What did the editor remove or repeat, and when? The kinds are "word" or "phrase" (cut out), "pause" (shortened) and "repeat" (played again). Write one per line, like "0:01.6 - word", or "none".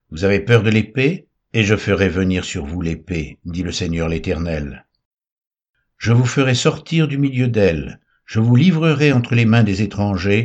none